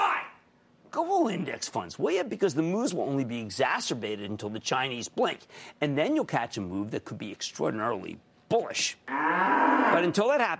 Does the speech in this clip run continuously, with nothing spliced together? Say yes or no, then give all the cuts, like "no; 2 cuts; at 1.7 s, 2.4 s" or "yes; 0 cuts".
yes; 0 cuts